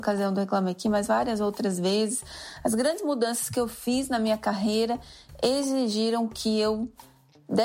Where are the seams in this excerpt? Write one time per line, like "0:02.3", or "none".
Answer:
none